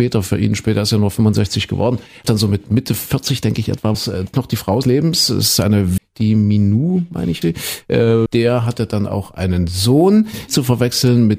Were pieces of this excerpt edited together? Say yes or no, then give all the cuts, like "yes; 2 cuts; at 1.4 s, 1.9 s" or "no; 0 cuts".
yes; 8 cuts; at 2.2 s, 3.9 s, 4.3 s, 4.8 s, 6.0 s, 7.4 s, 8.3 s, 10.5 s